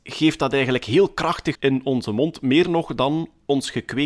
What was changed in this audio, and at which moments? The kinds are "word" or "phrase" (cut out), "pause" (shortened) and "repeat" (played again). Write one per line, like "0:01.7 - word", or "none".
0:01.5 - word